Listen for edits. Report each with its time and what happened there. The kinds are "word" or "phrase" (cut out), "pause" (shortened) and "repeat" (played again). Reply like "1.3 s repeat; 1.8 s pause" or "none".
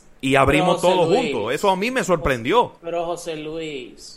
2.8 s pause

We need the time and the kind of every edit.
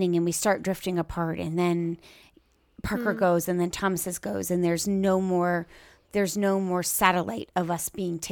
none

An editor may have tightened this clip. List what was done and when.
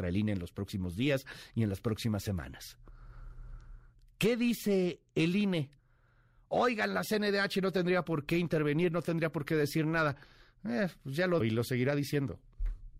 11.4 s word

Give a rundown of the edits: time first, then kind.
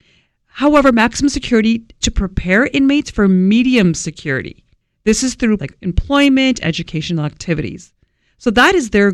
2.0 s word; 4.8 s pause; 5.6 s word

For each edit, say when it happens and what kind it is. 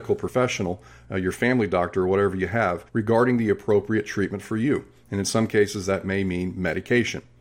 2.9 s pause

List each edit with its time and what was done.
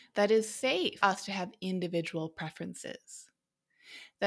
1.0 s word

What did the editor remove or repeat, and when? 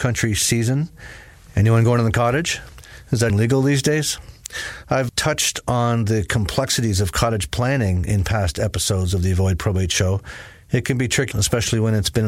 3.3 s word; 5.1 s word; 11.3 s word

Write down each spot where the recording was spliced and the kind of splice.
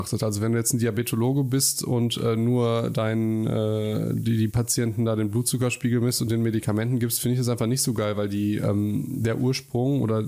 none

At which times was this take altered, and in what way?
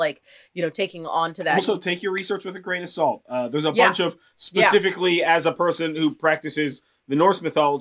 none

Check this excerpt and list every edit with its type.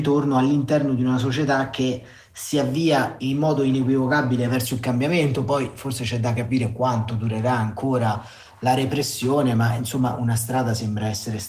none

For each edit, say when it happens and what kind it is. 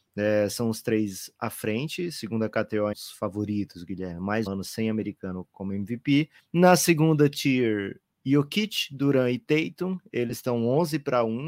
2.9 s word; 4.5 s word; 6.4 s pause

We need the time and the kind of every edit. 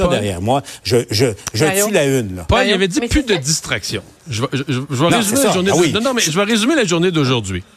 4.2 s pause

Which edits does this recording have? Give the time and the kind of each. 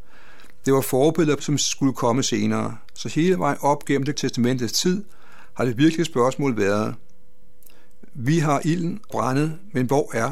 1.4 s word; 4.1 s word; 9.1 s word

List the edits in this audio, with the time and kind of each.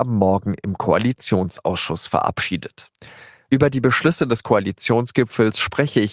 none

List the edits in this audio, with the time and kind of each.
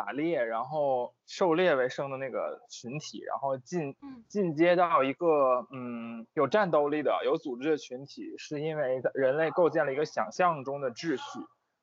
1.2 s pause; 6.3 s pause

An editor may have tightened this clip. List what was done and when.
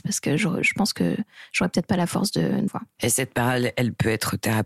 2.7 s phrase

